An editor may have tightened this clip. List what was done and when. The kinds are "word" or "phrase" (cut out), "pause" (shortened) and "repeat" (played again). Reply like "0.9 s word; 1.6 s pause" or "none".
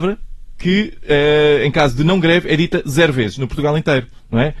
none